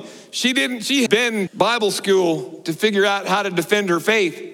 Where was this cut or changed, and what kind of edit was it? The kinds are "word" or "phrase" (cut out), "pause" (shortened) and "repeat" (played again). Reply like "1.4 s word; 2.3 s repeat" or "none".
1.1 s word; 1.5 s word